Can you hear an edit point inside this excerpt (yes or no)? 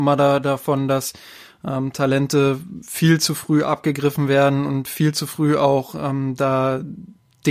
no